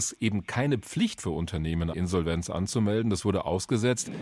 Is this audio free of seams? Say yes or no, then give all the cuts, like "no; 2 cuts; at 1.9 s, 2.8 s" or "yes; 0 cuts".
no; 2 cuts; at 1.2 s, 1.9 s